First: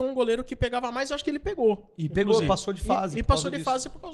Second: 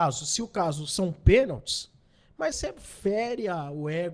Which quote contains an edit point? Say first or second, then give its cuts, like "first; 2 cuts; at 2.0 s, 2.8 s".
second; 1 cut; at 2.5 s